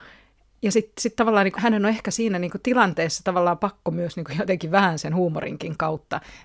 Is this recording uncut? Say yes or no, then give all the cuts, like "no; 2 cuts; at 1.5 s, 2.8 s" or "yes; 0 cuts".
no; 1 cut; at 1.6 s